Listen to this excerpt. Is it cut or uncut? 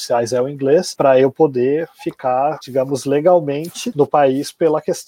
uncut